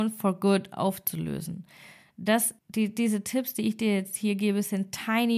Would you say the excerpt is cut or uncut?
cut